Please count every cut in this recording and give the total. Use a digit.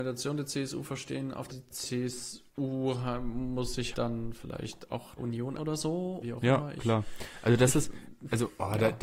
6